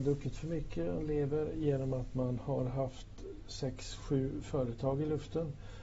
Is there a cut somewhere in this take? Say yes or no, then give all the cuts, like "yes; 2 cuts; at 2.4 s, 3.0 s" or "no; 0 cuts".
no; 0 cuts